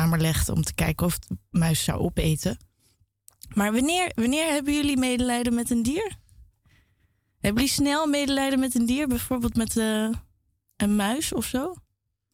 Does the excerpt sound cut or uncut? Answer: uncut